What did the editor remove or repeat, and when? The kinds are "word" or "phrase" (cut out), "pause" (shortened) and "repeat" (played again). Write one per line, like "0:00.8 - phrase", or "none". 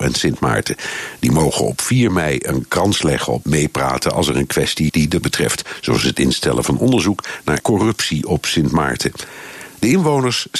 0:03.4 - phrase
0:04.9 - word
0:05.2 - word
0:07.6 - word